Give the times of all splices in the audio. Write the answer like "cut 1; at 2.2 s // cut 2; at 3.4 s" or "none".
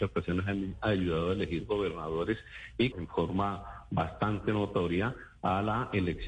cut 1; at 2.9 s